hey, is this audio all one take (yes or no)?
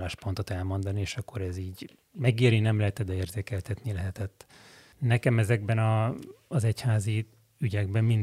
yes